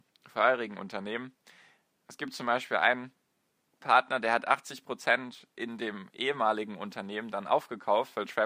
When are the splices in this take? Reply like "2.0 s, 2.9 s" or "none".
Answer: 3.8 s